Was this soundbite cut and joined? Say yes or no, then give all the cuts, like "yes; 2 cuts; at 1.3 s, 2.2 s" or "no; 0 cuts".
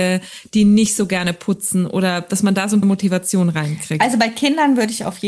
yes; 1 cut; at 2.8 s